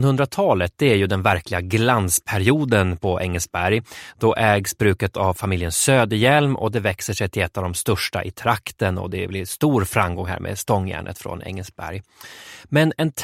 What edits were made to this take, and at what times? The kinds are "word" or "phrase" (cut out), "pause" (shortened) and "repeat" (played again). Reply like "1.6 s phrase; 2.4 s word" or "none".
none